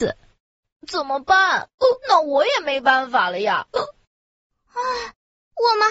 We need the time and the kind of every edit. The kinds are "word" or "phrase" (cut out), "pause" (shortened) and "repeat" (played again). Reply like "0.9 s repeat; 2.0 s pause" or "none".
2.0 s pause